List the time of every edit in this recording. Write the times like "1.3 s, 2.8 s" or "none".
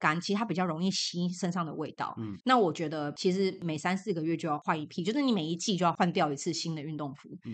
2.4 s